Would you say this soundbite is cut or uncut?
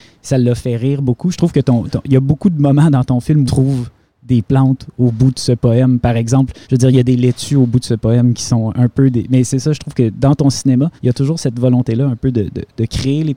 cut